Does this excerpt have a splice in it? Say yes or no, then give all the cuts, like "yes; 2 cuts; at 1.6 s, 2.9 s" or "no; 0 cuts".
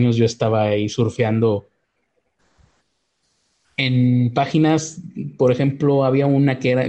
no; 0 cuts